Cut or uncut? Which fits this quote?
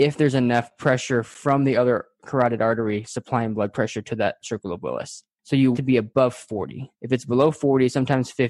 cut